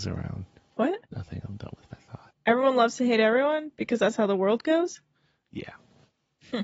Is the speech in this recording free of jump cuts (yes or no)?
no